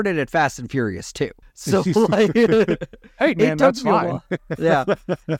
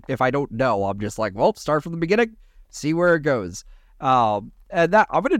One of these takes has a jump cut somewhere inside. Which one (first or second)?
first